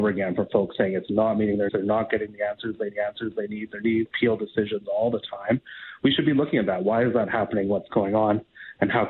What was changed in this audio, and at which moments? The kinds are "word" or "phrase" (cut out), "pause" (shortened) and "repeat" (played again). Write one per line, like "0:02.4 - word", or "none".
0:01.7 - word
0:02.9 - repeat
0:04.1 - word